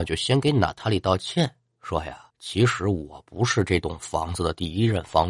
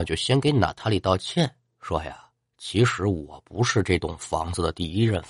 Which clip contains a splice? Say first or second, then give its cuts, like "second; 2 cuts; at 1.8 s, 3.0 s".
first; 1 cut; at 2.3 s